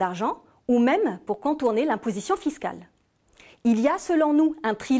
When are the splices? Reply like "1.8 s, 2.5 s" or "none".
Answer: none